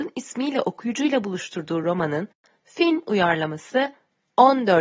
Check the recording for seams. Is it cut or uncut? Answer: uncut